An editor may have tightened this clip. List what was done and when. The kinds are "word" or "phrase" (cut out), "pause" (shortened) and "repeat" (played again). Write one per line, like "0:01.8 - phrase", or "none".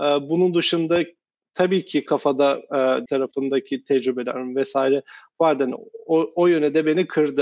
0:03.1 - phrase